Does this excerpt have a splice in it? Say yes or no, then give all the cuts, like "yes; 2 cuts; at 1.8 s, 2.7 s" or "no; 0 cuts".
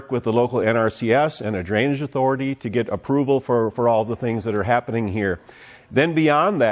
no; 0 cuts